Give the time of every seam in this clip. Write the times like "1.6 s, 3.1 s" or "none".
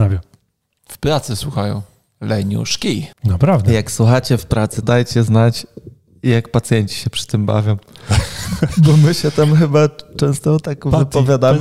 3.1 s, 4.8 s